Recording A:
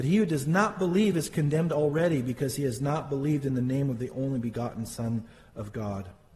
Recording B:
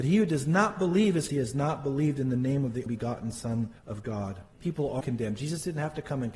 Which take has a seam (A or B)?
B